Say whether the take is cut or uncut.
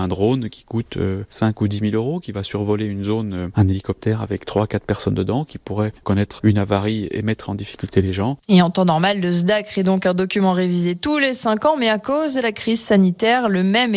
cut